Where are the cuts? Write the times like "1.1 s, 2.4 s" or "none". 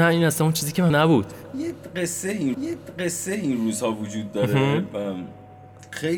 0.9 s, 2.5 s